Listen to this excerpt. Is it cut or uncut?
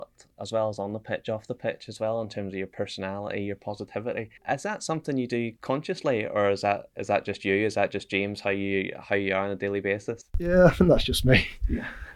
cut